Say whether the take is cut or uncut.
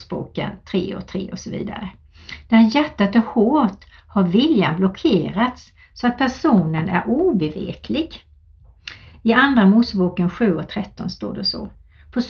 uncut